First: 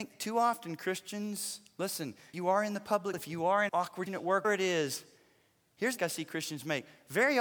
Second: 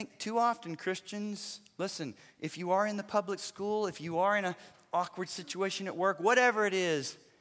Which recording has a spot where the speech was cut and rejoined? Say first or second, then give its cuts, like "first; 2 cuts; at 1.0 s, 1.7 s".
first; 6 cuts; at 2.3 s, 3.1 s, 3.7 s, 4.1 s, 4.4 s, 6.0 s